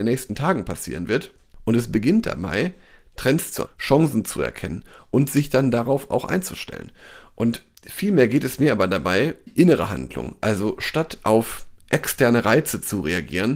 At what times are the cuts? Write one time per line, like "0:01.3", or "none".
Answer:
0:03.7
0:09.5